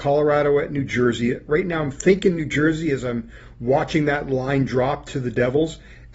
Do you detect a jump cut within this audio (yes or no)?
no